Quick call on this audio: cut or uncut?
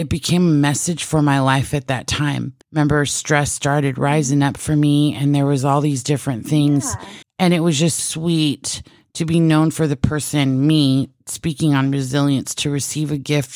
cut